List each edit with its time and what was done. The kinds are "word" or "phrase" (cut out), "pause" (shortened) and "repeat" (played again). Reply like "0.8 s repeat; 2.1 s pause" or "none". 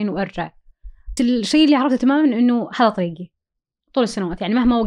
1.2 s phrase